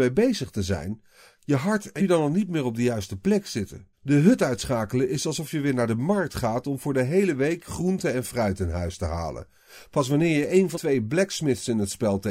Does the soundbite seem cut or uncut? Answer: cut